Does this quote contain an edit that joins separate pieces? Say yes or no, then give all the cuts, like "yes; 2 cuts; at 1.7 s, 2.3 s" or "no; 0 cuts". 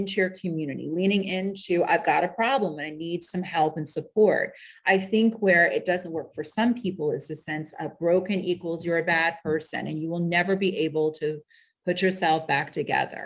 no; 0 cuts